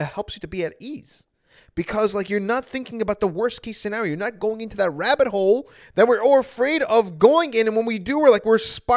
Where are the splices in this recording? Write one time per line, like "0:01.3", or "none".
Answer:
none